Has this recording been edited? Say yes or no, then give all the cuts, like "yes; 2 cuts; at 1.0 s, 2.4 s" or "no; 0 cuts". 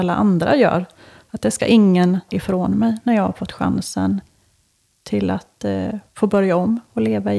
yes; 1 cut; at 2.3 s